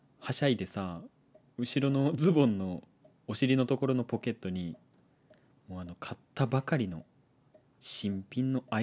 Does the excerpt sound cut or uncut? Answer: uncut